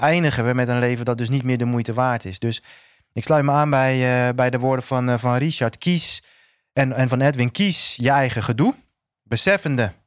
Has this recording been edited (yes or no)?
no